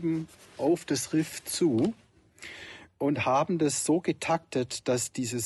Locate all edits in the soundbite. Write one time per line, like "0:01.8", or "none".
none